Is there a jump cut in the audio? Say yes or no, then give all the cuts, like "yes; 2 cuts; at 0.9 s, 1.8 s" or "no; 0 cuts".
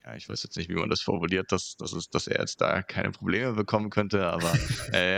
no; 0 cuts